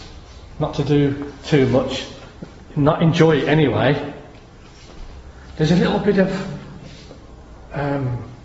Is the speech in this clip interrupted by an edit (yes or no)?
no